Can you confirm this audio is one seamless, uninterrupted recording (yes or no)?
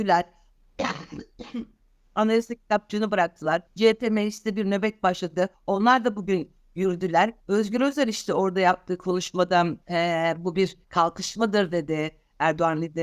no